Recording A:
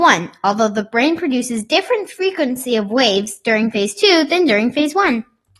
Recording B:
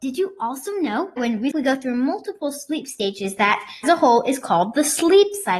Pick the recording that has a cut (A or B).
B